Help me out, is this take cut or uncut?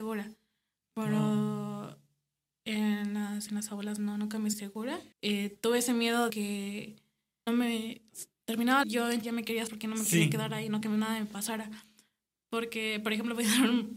cut